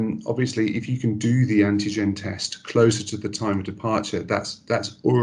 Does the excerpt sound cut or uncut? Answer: uncut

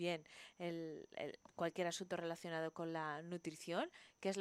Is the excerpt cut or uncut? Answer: uncut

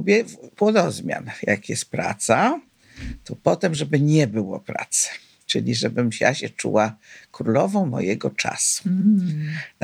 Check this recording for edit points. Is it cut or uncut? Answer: uncut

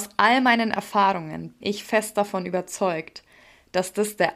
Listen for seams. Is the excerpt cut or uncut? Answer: cut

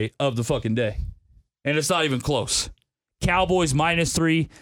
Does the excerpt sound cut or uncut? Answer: uncut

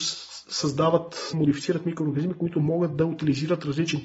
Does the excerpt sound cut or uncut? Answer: cut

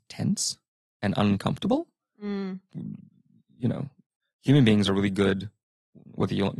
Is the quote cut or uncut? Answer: uncut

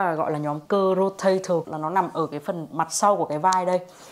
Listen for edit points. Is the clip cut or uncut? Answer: cut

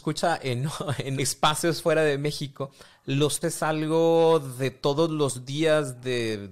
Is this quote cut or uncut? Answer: cut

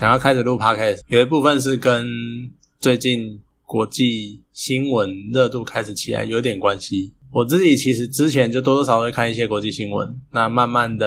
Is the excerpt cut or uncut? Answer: cut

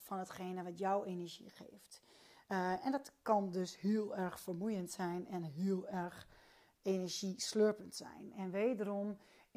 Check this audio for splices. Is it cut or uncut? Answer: uncut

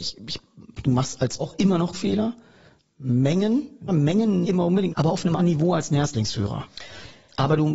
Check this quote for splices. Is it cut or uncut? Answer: cut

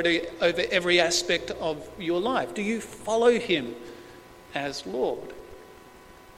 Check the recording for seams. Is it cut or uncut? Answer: uncut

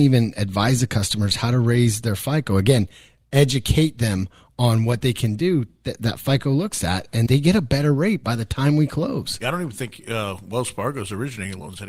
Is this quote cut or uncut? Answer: cut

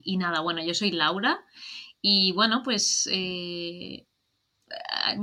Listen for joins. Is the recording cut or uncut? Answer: uncut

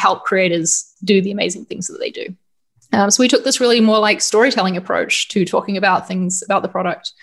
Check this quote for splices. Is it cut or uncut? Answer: uncut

